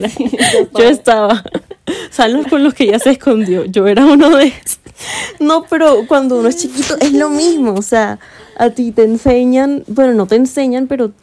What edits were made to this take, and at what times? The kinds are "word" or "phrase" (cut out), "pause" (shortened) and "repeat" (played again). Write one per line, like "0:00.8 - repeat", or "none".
0:02.4 - word